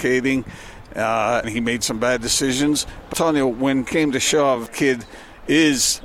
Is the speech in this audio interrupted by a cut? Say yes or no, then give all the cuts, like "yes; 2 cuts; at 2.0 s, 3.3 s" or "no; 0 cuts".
yes; 4 cuts; at 1.4 s, 3.1 s, 3.9 s, 4.7 s